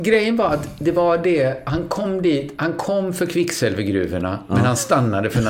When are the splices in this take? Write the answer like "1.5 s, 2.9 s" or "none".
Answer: none